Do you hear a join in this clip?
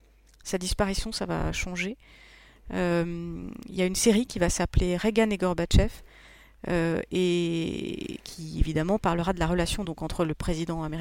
no; 0 cuts

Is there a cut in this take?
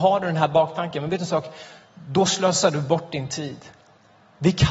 no; 0 cuts

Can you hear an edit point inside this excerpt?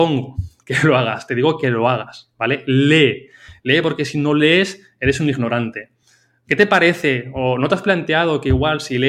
no; 0 cuts

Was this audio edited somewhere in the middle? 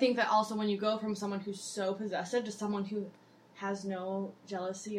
no; 0 cuts

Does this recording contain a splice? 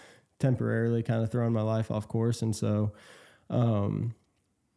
no; 0 cuts

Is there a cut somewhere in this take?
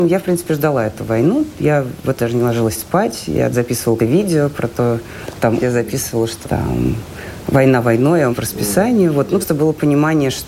yes; 7 cuts; at 2.2 s, 3.5 s, 4.0 s, 5.6 s, 6.4 s, 8.3 s, 9.4 s

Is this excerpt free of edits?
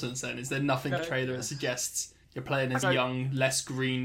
no; 3 cuts; at 1.0 s, 2.2 s, 2.8 s

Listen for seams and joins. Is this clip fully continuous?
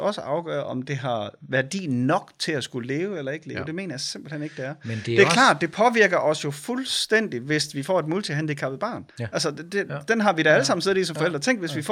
no; 1 cut; at 9.1 s

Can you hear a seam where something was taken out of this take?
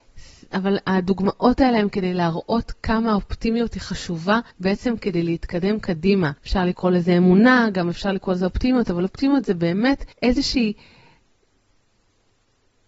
yes; 3 cuts; at 4.5 s, 6.4 s, 10.1 s

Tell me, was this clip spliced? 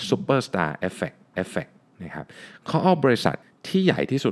yes; 2 cuts; at 1.3 s, 3.4 s

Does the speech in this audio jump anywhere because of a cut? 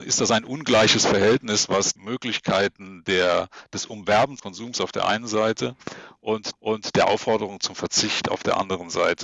yes; 3 cuts; at 2.0 s, 4.4 s, 6.5 s

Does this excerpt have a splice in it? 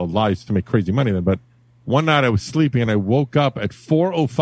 no; 0 cuts

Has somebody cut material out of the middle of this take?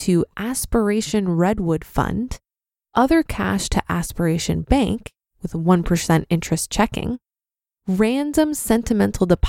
no; 0 cuts

